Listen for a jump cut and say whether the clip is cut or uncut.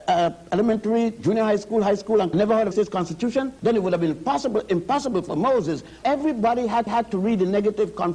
cut